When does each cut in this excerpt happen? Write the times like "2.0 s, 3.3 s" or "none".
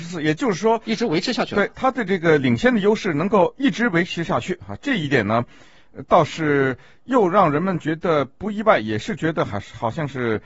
none